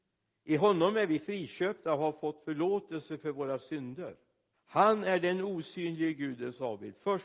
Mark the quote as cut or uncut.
cut